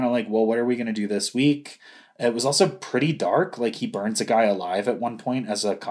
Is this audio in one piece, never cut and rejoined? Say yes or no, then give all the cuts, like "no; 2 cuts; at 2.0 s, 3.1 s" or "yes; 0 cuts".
yes; 0 cuts